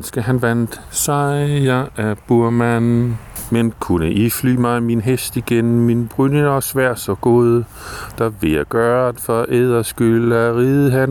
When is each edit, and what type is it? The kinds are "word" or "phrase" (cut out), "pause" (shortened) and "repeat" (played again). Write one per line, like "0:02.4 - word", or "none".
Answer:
none